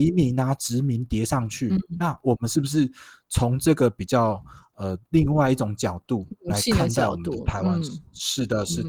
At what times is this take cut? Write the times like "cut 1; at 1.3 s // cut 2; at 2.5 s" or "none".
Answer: none